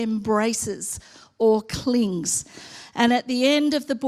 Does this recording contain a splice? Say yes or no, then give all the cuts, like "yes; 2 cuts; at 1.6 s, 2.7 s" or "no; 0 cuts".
no; 0 cuts